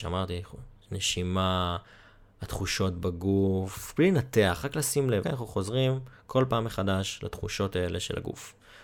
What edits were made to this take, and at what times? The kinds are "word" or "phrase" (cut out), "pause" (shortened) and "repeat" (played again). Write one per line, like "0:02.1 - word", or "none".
0:05.2 - word